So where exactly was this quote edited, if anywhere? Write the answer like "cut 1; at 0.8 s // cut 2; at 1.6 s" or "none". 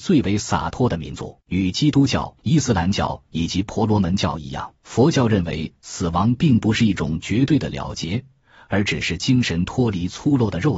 cut 1; at 1.4 s // cut 2; at 2.4 s // cut 3; at 4.8 s